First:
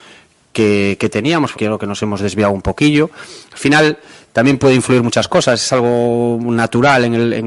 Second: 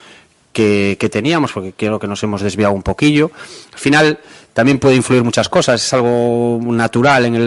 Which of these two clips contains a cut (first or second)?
first